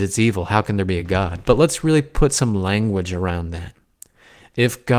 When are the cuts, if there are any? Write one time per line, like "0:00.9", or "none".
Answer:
none

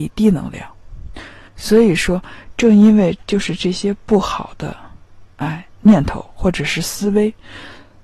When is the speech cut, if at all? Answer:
0:01.5

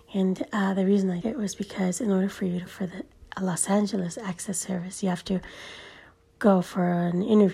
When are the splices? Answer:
0:01.2
0:02.7

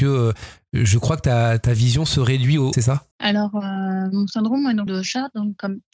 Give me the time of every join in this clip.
0:01.6
0:02.7
0:03.1
0:04.9

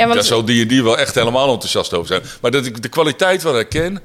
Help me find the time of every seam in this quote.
none

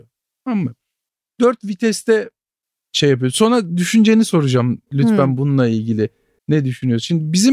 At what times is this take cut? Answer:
none

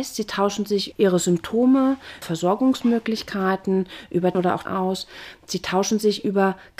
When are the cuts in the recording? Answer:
0:00.9
0:02.2
0:04.3
0:04.6

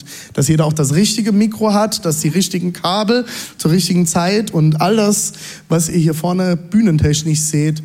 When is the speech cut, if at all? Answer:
none

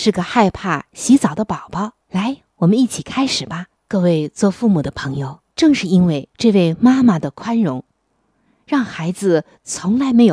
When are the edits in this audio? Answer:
0:02.0
0:03.8
0:05.5
0:06.3

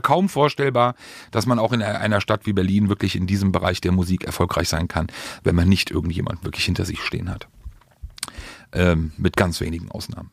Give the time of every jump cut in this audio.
none

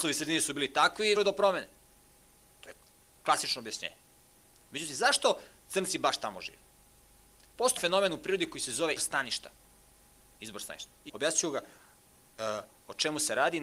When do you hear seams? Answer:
0:01.2
0:07.8
0:09.0
0:11.1

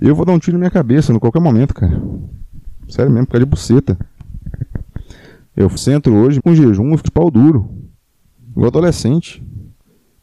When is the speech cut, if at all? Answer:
0:05.8
0:06.4
0:07.1

